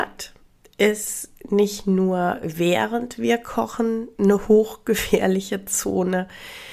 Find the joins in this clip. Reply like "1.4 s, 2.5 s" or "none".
none